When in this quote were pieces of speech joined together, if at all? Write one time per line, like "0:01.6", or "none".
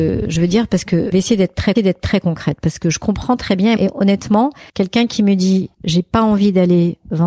0:01.1
0:01.8
0:03.8
0:04.7
0:05.7

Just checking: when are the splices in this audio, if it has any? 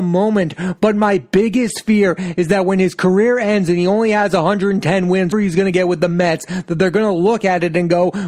0:05.3

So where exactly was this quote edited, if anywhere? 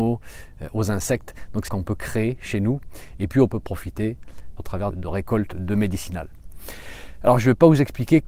0:01.7
0:03.5
0:04.6
0:04.9
0:05.5

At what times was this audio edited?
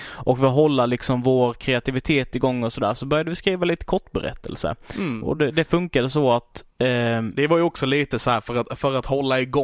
none

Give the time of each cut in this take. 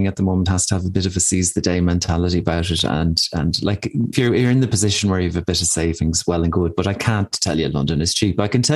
0:04.1

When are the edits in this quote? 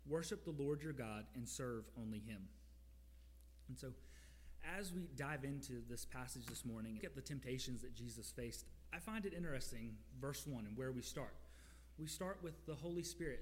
0:07.0

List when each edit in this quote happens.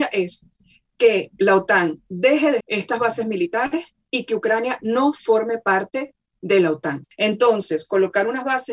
0:02.6

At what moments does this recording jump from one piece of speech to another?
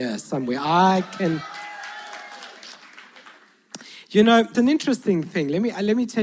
0:04.5

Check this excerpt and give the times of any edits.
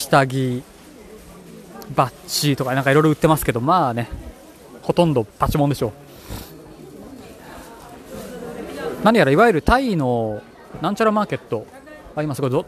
0:05.3

